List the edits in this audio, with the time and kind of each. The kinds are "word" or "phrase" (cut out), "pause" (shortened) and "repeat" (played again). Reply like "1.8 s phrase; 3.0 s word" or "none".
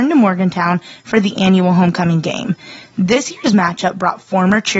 none